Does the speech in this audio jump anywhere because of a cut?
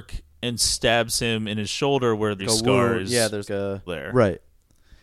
yes; 3 cuts; at 2.4 s, 3.4 s, 3.9 s

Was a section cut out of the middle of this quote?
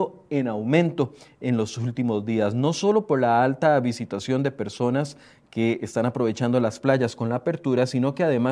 no; 0 cuts

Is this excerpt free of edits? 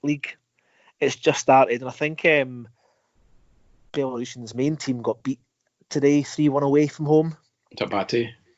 yes; 0 cuts

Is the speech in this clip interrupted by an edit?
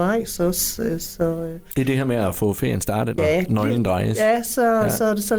yes; 1 cut; at 3.2 s

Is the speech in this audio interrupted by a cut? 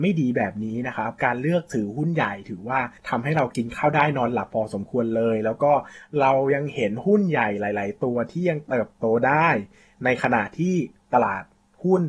yes; 1 cut; at 3.0 s

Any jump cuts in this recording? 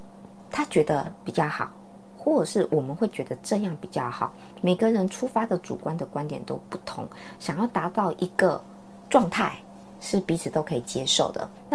no; 0 cuts

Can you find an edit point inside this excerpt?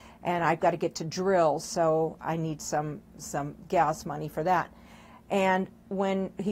no; 0 cuts

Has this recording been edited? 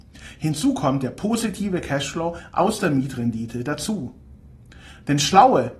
no; 0 cuts

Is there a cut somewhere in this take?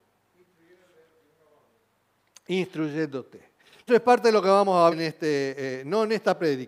yes; 2 cuts; at 3.9 s, 4.9 s

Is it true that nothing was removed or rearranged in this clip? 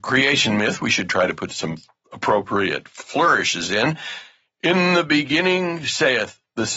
yes; 0 cuts

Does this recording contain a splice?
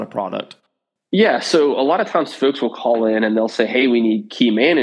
no; 0 cuts

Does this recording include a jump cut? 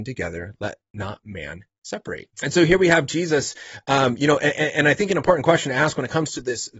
yes; 1 cut; at 2.3 s

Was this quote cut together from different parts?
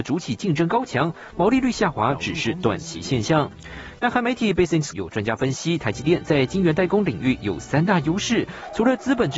yes; 1 cut; at 4.9 s

